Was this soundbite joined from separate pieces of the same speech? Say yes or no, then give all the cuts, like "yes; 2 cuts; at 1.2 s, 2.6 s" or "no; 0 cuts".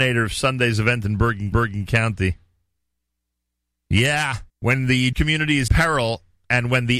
yes; 4 cuts; at 1.5 s, 4.5 s, 5.1 s, 5.7 s